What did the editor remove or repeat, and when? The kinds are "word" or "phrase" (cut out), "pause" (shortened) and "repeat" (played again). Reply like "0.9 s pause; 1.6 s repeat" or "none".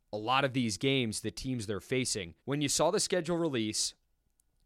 2.4 s pause